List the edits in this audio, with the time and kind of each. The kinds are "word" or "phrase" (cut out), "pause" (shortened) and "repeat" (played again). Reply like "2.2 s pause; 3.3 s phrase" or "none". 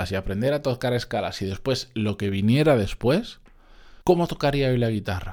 4.0 s pause